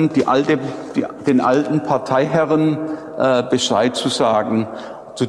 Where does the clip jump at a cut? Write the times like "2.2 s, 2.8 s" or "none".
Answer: none